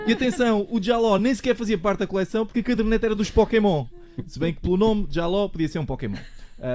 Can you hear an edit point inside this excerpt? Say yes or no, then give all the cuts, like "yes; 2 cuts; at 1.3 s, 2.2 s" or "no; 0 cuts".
no; 0 cuts